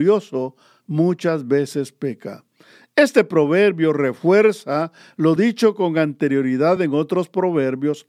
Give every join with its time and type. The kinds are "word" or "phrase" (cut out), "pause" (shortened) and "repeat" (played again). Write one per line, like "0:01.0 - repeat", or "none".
none